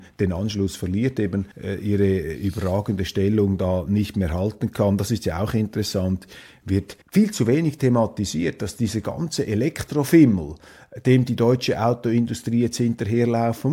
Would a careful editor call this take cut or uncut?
cut